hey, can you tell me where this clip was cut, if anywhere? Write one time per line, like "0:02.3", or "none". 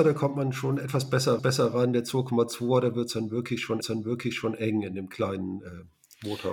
0:01.4
0:03.8

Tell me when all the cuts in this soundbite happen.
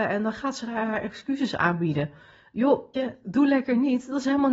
0:02.9

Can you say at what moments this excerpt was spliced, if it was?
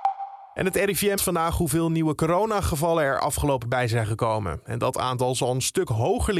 0:01.2
0:03.6

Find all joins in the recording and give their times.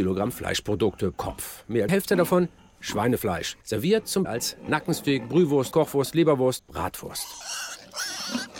0:01.1
0:01.9
0:03.6
0:04.2
0:05.7
0:06.6

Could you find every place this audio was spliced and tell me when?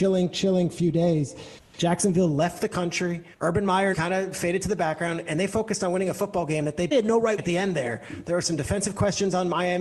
0:03.3
0:03.9
0:06.9
0:07.4

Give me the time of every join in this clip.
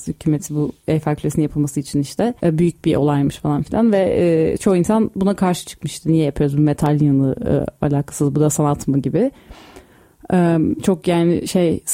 0:02.4

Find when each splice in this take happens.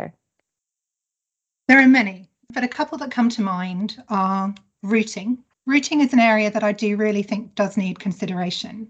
0:05.5

